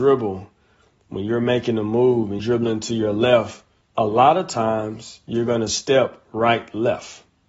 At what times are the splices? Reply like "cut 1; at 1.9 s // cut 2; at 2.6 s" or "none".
cut 1; at 2.4 s // cut 2; at 3.8 s